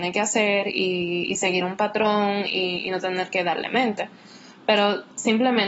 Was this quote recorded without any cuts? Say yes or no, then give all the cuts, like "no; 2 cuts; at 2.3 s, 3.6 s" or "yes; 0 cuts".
yes; 0 cuts